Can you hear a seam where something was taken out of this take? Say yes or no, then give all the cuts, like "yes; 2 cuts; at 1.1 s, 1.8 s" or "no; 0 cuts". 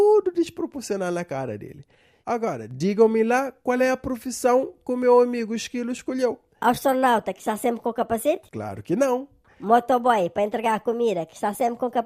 no; 0 cuts